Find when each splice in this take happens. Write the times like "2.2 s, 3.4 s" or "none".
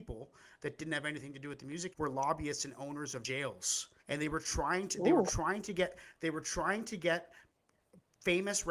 1.9 s, 4.0 s